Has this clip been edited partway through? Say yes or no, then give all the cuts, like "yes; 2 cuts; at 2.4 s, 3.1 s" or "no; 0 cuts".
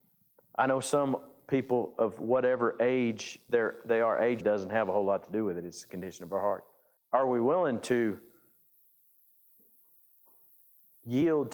yes; 2 cuts; at 4.4 s, 7.0 s